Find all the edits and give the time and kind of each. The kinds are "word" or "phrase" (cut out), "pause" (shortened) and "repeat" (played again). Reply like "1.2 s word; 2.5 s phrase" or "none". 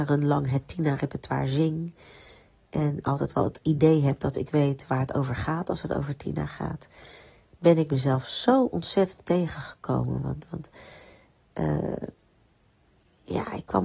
none